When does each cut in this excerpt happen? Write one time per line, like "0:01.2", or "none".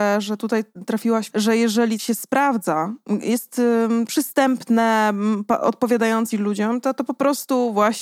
0:01.3
0:02.0
0:04.1
0:06.3